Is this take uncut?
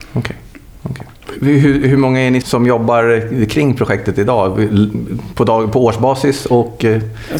no; 1 cut; at 2.4 s

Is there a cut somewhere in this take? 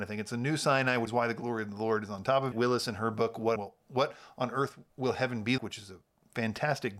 yes; 5 cuts; at 1.1 s, 2.5 s, 3.6 s, 4.9 s, 5.6 s

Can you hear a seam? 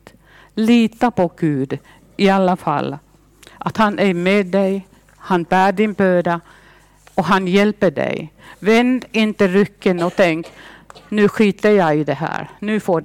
no; 0 cuts

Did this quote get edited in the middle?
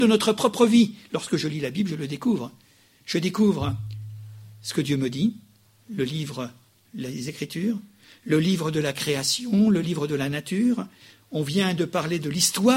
no; 0 cuts

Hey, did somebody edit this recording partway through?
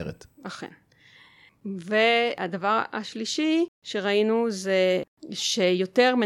no; 0 cuts

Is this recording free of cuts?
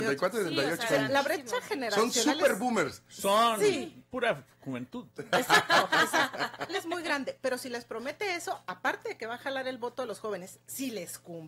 no; 1 cut; at 6.7 s

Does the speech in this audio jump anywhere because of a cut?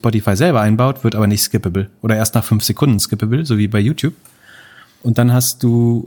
no; 0 cuts

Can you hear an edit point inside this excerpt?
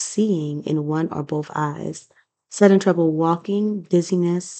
no; 0 cuts

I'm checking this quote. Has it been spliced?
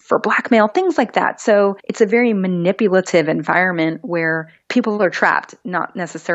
yes; 2 cuts; at 1.8 s, 4.6 s

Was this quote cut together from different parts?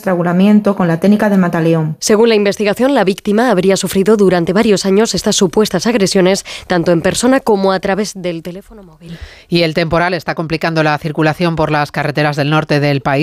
no; 0 cuts

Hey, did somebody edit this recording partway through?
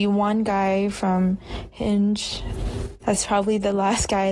yes; 1 cut; at 3.0 s

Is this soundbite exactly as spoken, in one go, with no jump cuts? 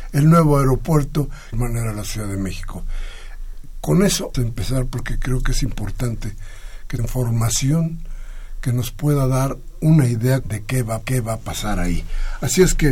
no; 5 cuts; at 1.5 s, 4.3 s, 7.0 s, 10.4 s, 11.0 s

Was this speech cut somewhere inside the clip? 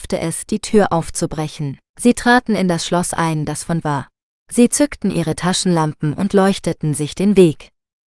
yes; 3 cuts; at 1.9 s, 3.8 s, 4.2 s

